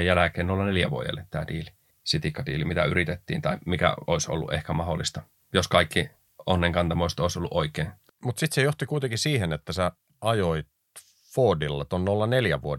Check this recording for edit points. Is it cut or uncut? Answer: uncut